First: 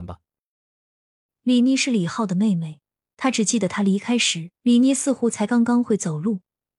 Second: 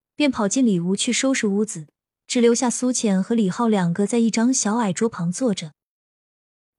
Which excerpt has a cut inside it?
first; 1 cut; at 4.6 s

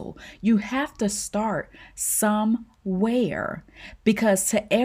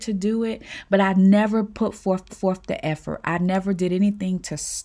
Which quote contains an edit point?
second; 1 cut; at 2.3 s

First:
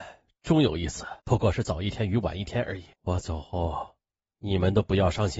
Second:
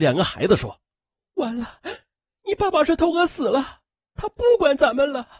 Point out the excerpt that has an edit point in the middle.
first; 2 cuts; at 1.2 s, 2.9 s

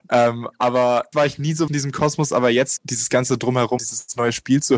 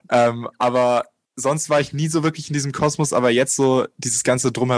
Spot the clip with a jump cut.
first; 4 cuts; at 1.1 s, 1.7 s, 2.8 s, 3.8 s

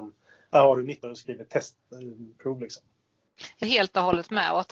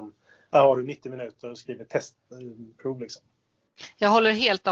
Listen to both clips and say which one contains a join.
first; 2 cuts; at 1.0 s, 3.6 s

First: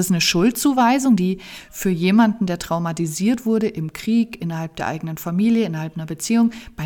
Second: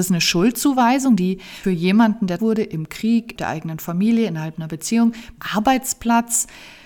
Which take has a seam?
second; 4 cuts; at 1.6 s, 2.4 s, 3.4 s, 5.4 s

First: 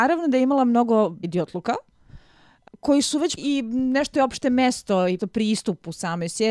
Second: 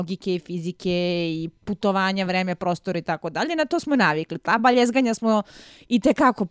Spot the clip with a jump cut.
first; 5 cuts; at 1.2 s, 2.7 s, 3.4 s, 4.1 s, 5.2 s

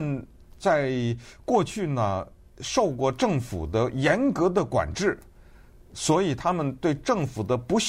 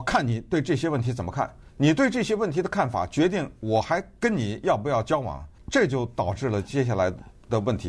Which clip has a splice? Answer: second; 2 cuts; at 1.7 s, 5.6 s

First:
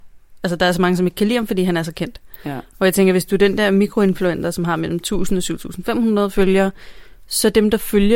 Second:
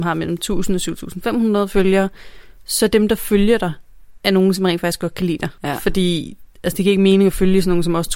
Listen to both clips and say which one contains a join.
second; 1 cut; at 5.6 s

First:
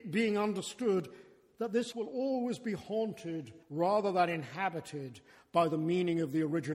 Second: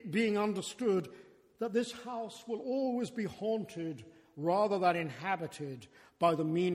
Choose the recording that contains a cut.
first; 2 cuts; at 1.9 s, 3.6 s

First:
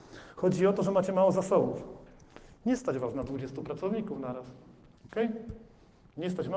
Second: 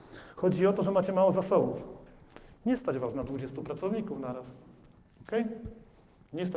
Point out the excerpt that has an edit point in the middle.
first; 1 cut; at 5.0 s

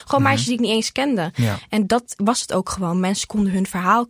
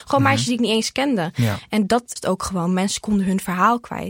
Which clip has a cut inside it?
second; 1 cut; at 2.2 s

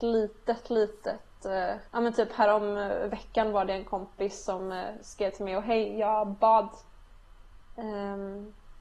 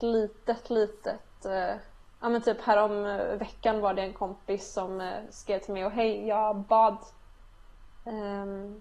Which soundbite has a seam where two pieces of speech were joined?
first; 1 cut; at 1.9 s

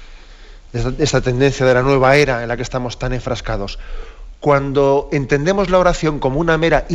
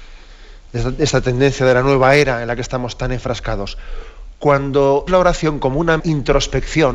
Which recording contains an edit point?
second; 2 cuts; at 5.1 s, 6.0 s

